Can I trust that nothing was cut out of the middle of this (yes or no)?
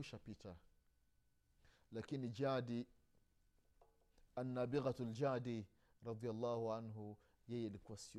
yes